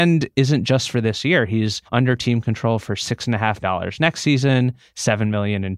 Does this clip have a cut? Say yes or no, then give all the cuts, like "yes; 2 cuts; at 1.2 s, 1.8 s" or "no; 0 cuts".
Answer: yes; 2 cuts; at 1.9 s, 3.6 s